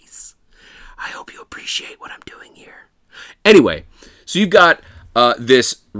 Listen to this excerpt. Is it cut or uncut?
uncut